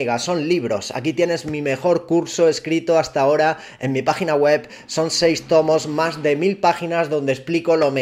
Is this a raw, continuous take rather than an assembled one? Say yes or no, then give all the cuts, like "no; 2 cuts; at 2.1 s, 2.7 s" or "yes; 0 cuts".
yes; 0 cuts